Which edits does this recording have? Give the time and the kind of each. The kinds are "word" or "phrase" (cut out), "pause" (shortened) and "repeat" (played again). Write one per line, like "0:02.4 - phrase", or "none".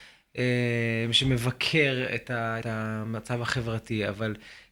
0:02.6 - phrase